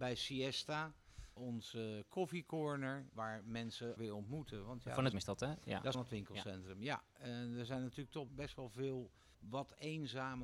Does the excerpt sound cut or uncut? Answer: cut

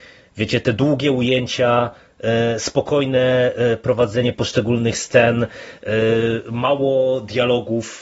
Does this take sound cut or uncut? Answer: cut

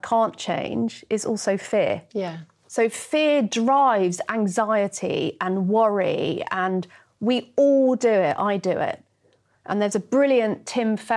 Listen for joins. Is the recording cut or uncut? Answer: uncut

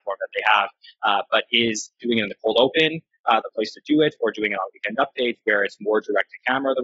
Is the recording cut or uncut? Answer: cut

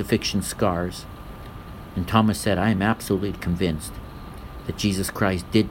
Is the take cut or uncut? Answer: uncut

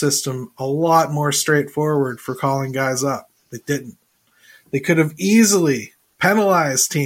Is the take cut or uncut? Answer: uncut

